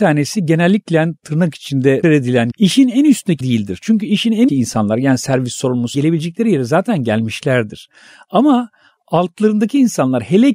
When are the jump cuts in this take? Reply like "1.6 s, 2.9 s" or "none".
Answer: 2.0 s, 2.5 s, 3.4 s, 4.5 s, 5.9 s